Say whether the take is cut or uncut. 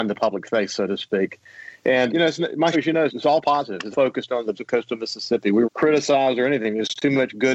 cut